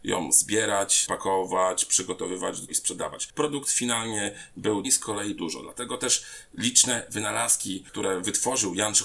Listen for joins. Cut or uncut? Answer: cut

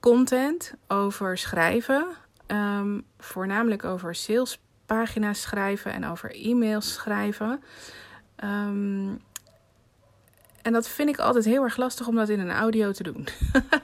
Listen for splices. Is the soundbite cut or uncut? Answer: uncut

